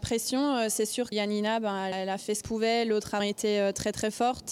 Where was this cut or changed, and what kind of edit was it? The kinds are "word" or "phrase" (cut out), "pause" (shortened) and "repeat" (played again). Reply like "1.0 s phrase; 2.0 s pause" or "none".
1.1 s word; 1.9 s word; 2.4 s word; 3.2 s word

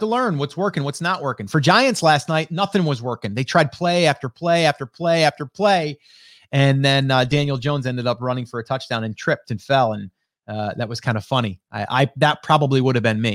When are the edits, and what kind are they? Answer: none

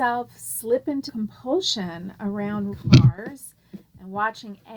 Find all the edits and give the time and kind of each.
1.1 s word; 2.7 s word

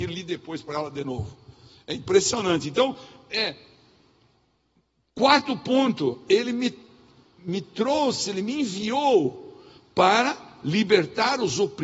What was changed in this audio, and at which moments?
none

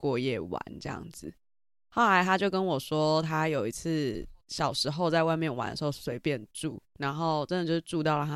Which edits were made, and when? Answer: none

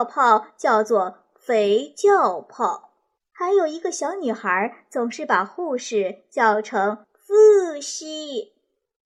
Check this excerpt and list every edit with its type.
3.2 s pause; 7.0 s pause

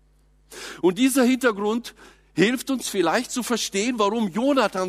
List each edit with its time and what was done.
none

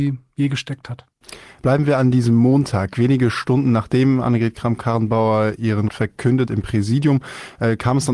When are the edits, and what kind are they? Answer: 5.9 s word; 6.5 s word

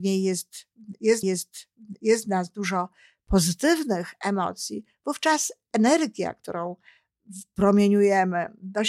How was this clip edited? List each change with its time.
1.2 s repeat

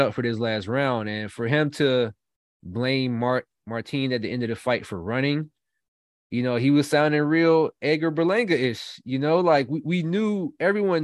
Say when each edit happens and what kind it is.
none

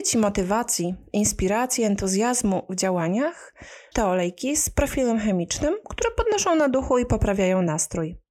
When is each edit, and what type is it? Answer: 3.9 s word

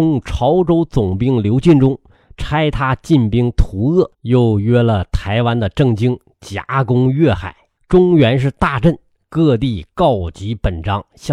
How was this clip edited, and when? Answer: 4.1 s pause; 7.8 s pause

